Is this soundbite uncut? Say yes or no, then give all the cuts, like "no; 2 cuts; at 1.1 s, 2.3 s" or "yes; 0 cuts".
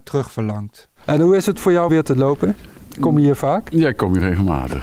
no; 1 cut; at 1.9 s